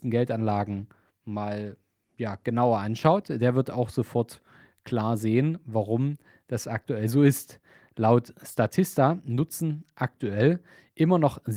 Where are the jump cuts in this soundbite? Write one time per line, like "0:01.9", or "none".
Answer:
none